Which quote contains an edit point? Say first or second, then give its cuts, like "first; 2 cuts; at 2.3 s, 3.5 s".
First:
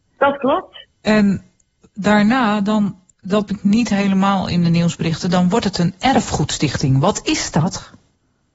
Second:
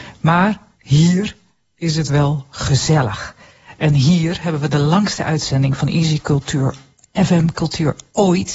first; 2 cuts; at 0.9 s, 3.5 s